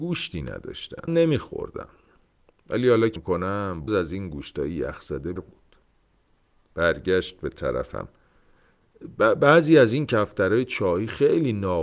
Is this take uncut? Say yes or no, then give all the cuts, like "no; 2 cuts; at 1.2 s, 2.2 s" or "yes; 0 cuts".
no; 4 cuts; at 1.1 s, 3.2 s, 3.9 s, 5.4 s